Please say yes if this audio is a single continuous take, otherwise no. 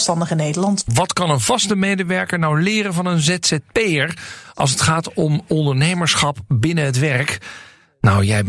yes